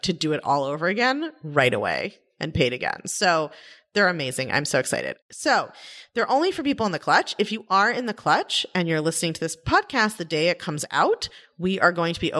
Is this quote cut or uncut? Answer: uncut